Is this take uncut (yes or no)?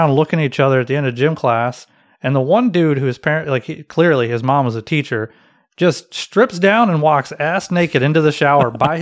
yes